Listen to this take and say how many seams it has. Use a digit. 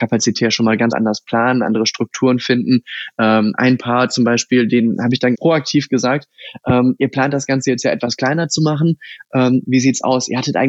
2